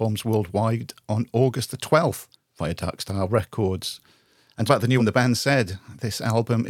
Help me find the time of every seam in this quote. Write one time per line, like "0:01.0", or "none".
0:02.3
0:04.7
0:05.0